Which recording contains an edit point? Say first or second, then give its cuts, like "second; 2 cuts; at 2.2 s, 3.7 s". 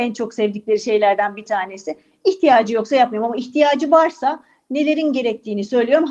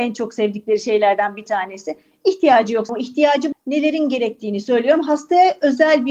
second; 2 cuts; at 2.9 s, 3.5 s